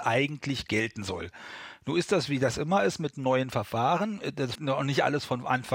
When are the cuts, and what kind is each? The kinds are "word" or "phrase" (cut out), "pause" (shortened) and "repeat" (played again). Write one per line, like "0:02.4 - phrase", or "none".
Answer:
0:04.6 - word